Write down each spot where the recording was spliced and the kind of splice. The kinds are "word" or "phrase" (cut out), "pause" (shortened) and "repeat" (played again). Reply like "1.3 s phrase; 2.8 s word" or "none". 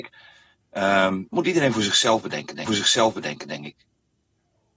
1.3 s word; 2.7 s repeat

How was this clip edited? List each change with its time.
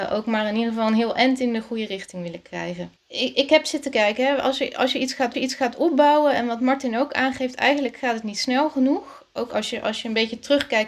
3.0 s pause; 5.3 s repeat

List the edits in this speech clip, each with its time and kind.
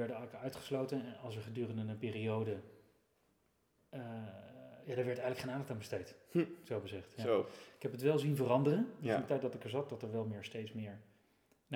none

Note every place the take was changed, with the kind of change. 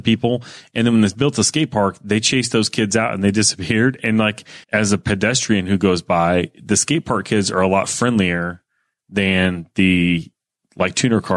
4.6 s pause

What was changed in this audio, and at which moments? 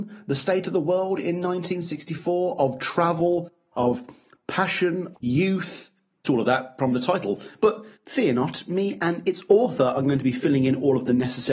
5.1 s word; 6.2 s phrase; 7.9 s pause

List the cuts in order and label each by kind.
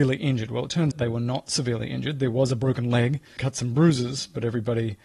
0.9 s word; 3.4 s phrase

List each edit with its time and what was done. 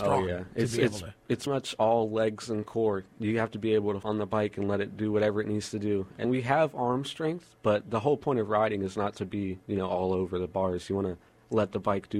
1.5 s word; 4.0 s word; 6.2 s word

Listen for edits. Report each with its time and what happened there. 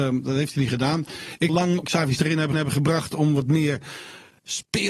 1.5 s phrase; 1.8 s word; 2.2 s word; 2.5 s repeat

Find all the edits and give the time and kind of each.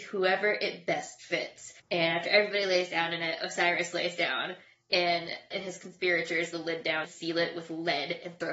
1.8 s pause; 5.5 s word; 6.5 s phrase; 7.0 s word

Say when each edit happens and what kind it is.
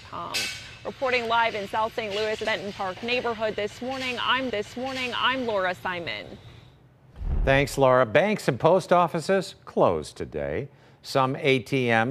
2.4 s word; 4.5 s repeat

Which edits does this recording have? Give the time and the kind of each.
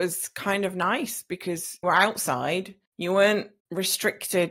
1.8 s word; 2.9 s pause; 3.6 s pause

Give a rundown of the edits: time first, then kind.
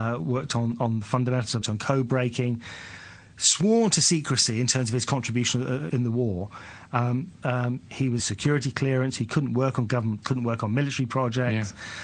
1.6 s phrase; 5.9 s word; 7.4 s phrase; 8.2 s phrase; 10.2 s word

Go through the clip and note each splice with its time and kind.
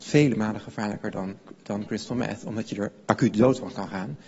none

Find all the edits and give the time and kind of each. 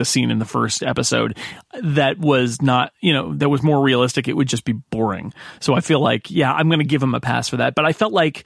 none

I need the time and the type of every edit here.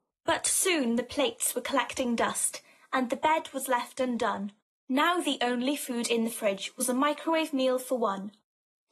none

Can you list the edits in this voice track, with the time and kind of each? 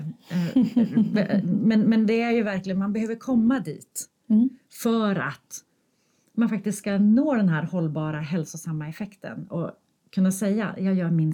none

